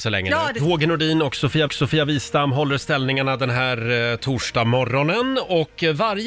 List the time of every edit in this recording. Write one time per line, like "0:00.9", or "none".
0:01.7